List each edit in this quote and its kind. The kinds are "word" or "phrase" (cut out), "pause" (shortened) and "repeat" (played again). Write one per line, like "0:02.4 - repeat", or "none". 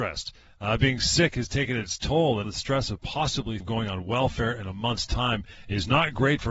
0:02.4 - word
0:03.6 - word